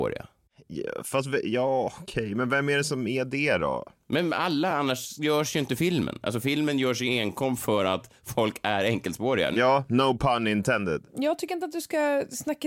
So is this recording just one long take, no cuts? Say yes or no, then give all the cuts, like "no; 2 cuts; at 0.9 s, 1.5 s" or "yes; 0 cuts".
yes; 0 cuts